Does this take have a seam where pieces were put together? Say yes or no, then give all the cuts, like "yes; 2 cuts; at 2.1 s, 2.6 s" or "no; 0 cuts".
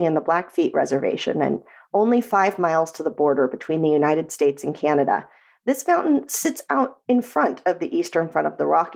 no; 0 cuts